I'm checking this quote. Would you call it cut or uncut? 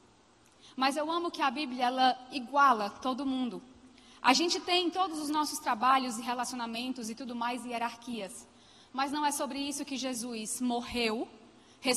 uncut